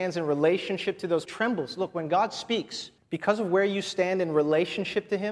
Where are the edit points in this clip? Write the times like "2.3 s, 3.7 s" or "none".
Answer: 1.3 s, 3.0 s